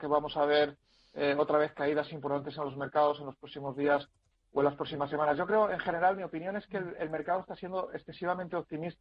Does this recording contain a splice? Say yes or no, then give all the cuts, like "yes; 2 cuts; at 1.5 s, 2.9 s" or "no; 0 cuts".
no; 0 cuts